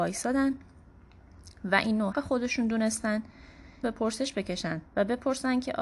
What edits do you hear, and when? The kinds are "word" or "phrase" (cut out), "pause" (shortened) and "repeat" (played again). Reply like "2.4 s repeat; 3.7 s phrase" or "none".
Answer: 2.1 s word; 3.8 s phrase; 4.9 s pause

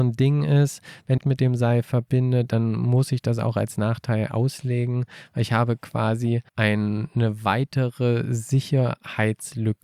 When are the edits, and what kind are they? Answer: 1.2 s phrase; 6.5 s pause

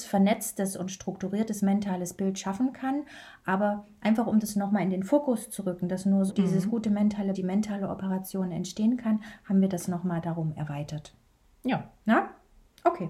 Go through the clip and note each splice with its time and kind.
6.3 s word; 7.3 s word

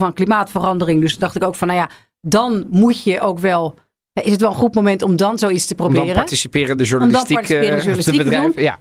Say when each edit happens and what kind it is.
none

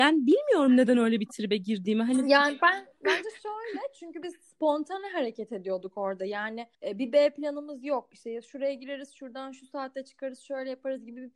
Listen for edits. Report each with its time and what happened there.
6.7 s pause

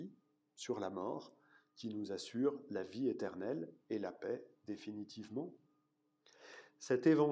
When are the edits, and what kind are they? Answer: none

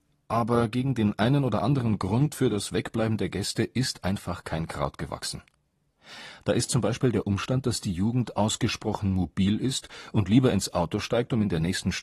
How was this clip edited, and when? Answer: none

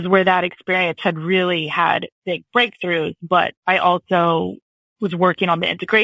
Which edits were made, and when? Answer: none

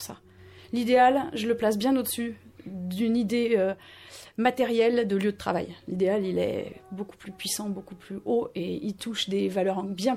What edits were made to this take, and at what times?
none

